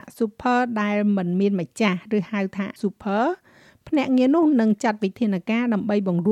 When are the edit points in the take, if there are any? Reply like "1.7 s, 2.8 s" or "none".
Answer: 2.8 s